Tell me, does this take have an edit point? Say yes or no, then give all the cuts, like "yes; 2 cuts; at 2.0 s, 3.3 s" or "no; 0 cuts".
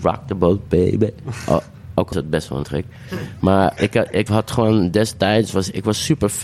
yes; 4 cuts; at 2.1 s, 2.6 s, 3.8 s, 4.3 s